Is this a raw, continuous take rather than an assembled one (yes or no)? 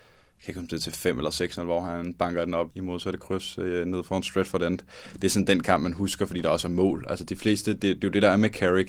no